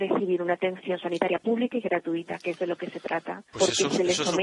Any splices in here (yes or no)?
yes